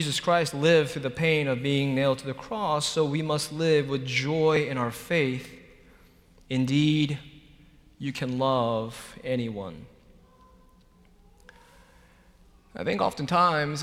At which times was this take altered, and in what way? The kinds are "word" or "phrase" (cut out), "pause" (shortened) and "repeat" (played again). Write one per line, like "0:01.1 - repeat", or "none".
none